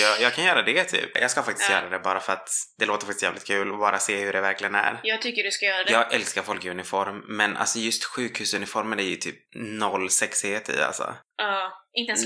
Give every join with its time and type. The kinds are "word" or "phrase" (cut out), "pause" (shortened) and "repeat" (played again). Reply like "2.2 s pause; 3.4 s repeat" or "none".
11.2 s pause